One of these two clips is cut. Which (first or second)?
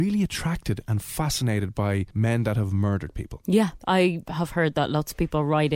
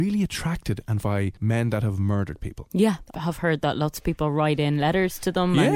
second